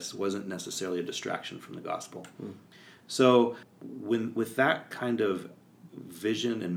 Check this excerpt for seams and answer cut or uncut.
uncut